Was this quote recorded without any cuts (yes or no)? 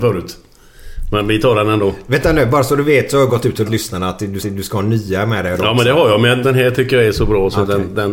no